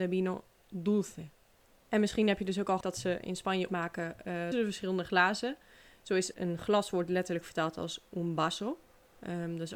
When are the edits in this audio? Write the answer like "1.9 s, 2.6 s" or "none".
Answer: 2.8 s, 3.7 s, 4.5 s, 6.3 s